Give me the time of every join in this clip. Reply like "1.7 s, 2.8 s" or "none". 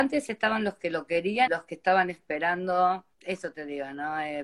1.5 s, 3.1 s